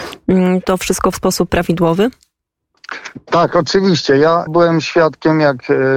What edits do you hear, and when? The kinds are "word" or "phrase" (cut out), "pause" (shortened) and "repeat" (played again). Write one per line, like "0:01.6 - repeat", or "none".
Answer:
0:01.1 - word
0:01.5 - word
0:04.5 - word